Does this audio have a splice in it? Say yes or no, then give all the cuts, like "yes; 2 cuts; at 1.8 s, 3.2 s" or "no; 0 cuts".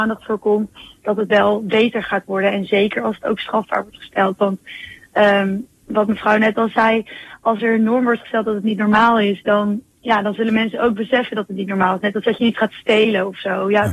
no; 0 cuts